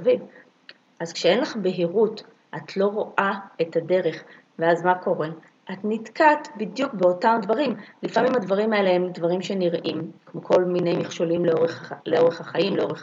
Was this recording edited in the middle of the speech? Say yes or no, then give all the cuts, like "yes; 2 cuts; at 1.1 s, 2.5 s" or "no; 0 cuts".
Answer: no; 0 cuts